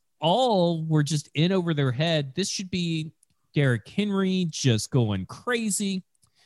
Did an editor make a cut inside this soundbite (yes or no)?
no